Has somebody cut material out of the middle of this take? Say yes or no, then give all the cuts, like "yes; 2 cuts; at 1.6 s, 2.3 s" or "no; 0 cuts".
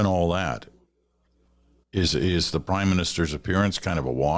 no; 0 cuts